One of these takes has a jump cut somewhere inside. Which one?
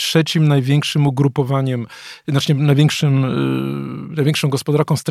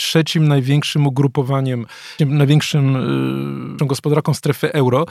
second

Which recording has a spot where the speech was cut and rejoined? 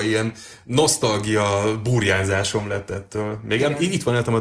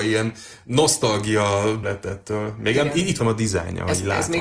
second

